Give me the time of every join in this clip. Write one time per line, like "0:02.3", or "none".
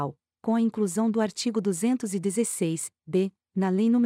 none